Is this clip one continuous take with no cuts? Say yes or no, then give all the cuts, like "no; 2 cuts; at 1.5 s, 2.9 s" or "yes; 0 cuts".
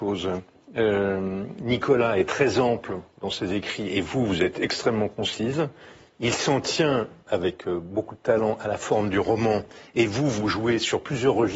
yes; 0 cuts